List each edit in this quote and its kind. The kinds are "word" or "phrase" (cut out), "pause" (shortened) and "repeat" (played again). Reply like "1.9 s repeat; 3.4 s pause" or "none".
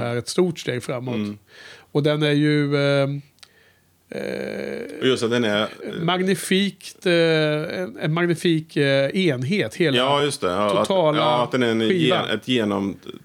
none